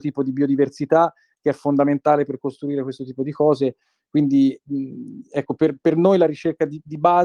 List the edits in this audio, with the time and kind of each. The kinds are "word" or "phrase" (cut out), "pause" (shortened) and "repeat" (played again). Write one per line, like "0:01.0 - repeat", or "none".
none